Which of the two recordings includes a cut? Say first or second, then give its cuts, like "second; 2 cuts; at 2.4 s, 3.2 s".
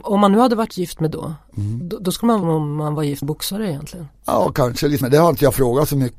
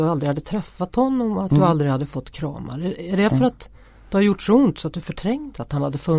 first; 5 cuts; at 1.1 s, 2.4 s, 3.2 s, 4.2 s, 5.0 s